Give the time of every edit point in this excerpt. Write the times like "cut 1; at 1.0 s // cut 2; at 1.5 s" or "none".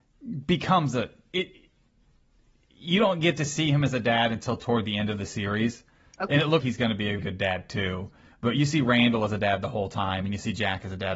cut 1; at 1.3 s // cut 2; at 6.6 s // cut 3; at 7.2 s